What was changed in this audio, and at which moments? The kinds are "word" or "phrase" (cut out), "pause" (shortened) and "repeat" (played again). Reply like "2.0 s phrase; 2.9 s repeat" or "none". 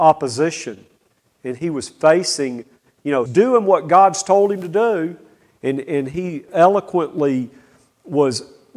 3.3 s word; 6.5 s word